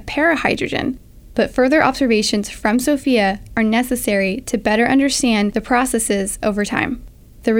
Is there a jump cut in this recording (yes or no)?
no